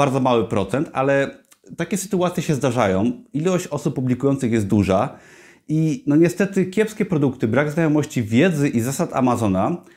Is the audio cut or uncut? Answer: uncut